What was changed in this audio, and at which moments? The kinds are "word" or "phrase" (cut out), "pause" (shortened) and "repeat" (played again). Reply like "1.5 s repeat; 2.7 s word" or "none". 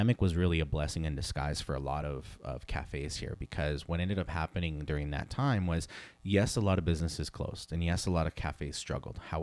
none